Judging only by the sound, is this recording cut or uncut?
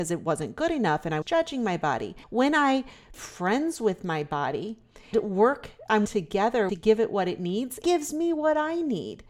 cut